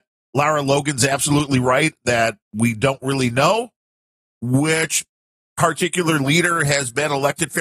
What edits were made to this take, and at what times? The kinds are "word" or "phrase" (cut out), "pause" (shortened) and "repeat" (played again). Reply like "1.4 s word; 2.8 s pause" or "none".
2.4 s pause